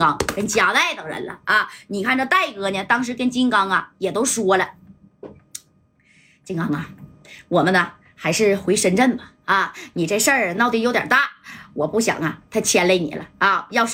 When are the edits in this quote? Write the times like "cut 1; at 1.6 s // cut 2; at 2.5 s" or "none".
none